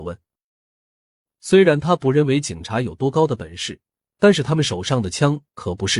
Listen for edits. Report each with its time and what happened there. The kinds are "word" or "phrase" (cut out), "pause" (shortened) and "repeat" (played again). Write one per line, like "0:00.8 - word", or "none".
none